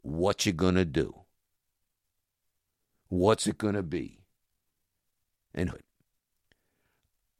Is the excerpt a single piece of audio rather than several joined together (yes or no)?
no